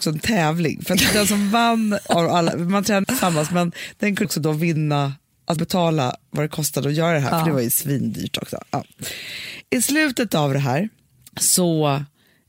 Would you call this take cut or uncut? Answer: cut